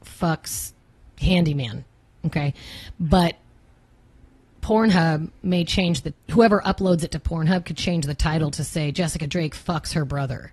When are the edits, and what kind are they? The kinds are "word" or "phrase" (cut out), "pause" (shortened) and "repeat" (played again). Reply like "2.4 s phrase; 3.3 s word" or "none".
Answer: none